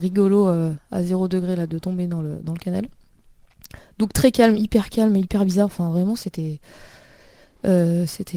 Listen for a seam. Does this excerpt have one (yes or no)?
no